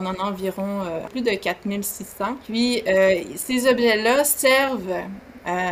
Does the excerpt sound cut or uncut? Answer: cut